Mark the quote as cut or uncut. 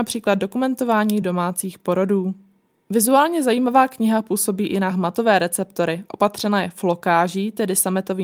uncut